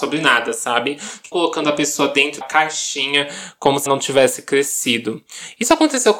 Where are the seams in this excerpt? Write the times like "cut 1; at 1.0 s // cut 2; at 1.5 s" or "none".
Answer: cut 1; at 1.3 s // cut 2; at 2.4 s // cut 3; at 3.9 s